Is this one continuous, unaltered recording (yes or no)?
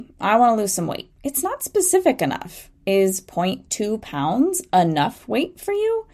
no